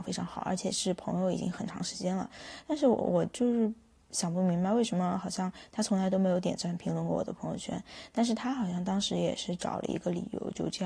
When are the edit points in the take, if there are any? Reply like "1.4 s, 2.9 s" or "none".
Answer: none

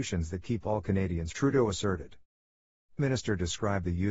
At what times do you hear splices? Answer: 1.3 s, 3.0 s

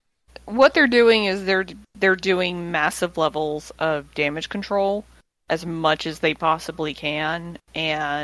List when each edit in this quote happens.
none

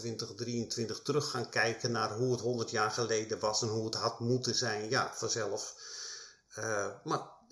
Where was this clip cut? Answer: none

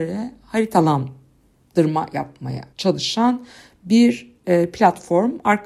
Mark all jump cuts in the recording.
2.7 s

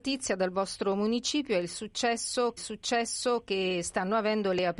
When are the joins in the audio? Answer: 2.6 s

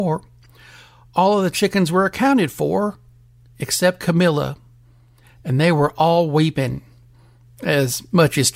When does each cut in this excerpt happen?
none

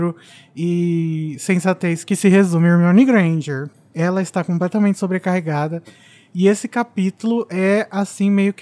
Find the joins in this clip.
none

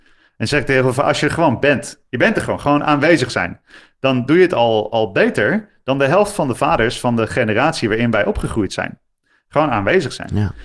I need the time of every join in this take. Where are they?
2.1 s

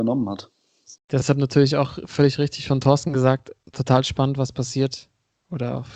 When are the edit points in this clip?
1.0 s

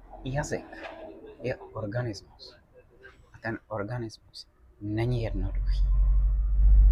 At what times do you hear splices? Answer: none

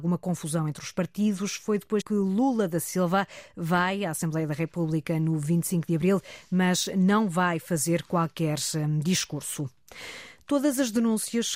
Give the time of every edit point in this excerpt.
2.0 s

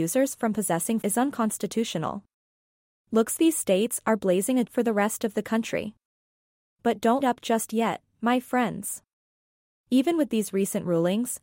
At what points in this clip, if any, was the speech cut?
1.0 s, 3.4 s, 4.7 s, 7.2 s

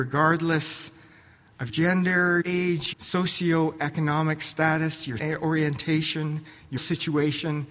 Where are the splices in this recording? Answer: 1.7 s, 2.4 s, 2.9 s, 5.2 s, 6.8 s

